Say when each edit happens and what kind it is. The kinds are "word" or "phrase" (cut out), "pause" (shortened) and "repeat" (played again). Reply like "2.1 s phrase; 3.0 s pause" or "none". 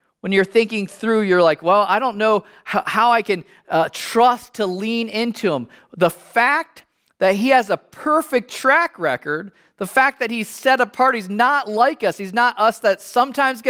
none